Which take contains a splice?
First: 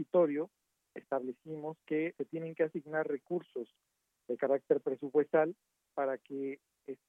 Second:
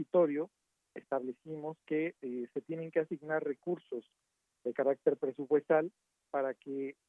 first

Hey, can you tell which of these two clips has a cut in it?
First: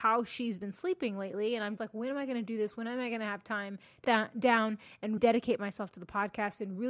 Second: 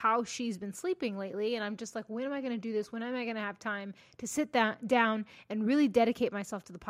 first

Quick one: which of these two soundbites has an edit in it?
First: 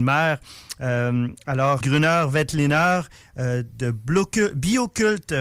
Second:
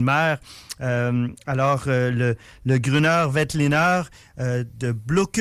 first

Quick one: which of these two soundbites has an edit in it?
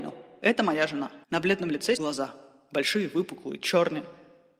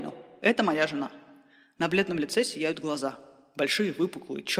first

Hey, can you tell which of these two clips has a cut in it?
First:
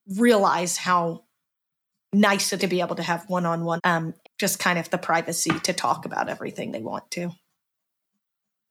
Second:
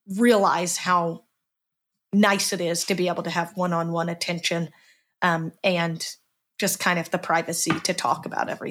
first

